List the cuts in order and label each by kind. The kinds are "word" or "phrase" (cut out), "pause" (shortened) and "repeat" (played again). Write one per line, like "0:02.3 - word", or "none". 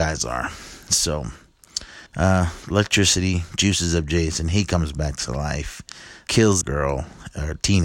0:02.1 - pause
0:06.3 - word
0:06.6 - phrase